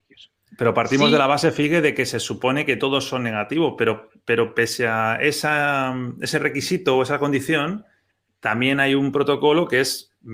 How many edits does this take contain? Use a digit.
0